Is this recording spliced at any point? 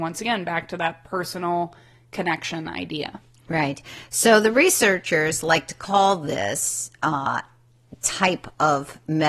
no; 0 cuts

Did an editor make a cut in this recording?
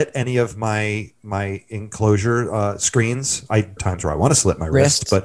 yes; 1 cut; at 3.8 s

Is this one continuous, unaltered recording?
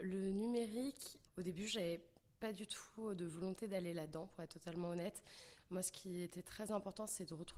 no; 1 cut; at 1.3 s

